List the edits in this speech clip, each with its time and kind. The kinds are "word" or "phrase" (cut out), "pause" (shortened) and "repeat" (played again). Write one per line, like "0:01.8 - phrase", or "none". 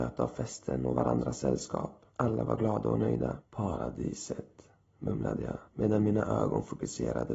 0:02.1 - pause
0:03.5 - pause
0:05.7 - pause